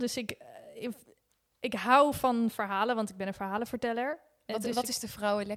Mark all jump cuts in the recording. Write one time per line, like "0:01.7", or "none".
none